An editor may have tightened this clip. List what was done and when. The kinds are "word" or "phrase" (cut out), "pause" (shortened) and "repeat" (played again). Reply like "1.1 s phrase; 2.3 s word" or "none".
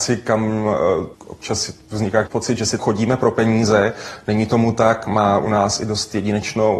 1.1 s word; 2.3 s word; 2.8 s word